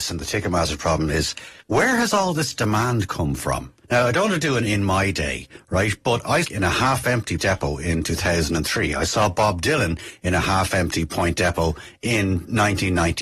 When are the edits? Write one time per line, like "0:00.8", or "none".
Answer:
0:01.6
0:03.8
0:06.4
0:07.4